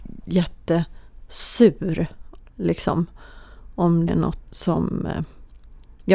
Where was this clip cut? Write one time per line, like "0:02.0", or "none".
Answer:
0:02.4
0:04.1
0:04.4